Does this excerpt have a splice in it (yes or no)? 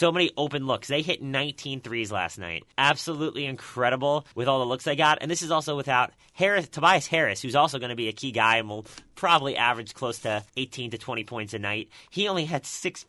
yes